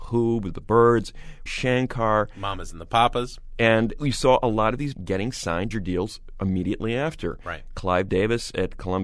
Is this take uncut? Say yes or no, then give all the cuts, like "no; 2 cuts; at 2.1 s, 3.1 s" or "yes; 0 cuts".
no; 3 cuts; at 1.5 s, 4.9 s, 5.7 s